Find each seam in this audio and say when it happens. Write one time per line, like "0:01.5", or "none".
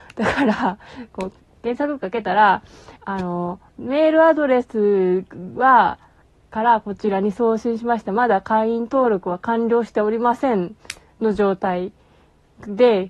0:03.0
0:03.7
0:06.2